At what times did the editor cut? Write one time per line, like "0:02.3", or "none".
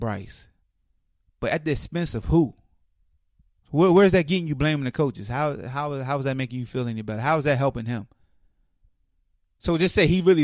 none